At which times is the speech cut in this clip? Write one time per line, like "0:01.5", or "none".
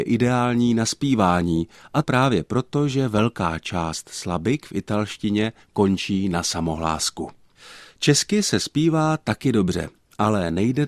0:02.0